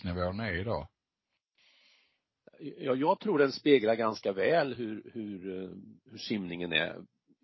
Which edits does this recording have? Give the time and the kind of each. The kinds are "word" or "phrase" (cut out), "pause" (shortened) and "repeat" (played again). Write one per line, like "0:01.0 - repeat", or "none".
none